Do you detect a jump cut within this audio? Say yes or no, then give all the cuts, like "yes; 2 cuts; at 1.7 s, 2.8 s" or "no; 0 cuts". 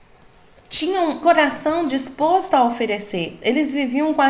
yes; 1 cut; at 1.2 s